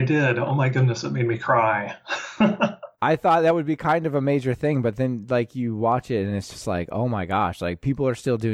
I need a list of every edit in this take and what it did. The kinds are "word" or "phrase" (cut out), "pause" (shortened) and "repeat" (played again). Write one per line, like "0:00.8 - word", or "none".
none